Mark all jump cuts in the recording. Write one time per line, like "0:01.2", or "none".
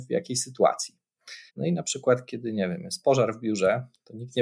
0:01.5